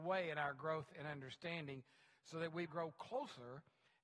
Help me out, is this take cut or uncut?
cut